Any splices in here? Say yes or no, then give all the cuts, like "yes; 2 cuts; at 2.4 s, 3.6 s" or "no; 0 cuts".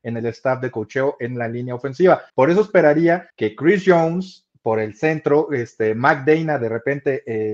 yes; 2 cuts; at 2.3 s, 3.3 s